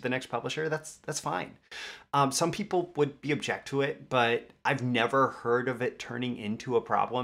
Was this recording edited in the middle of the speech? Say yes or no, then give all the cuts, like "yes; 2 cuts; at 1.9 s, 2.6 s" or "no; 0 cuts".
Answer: yes; 1 cut; at 3.2 s